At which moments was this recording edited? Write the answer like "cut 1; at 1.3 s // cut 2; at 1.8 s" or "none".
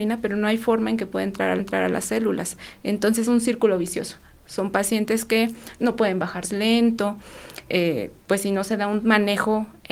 cut 1; at 1.6 s // cut 2; at 3.3 s // cut 3; at 5.8 s // cut 4; at 6.4 s // cut 5; at 7.7 s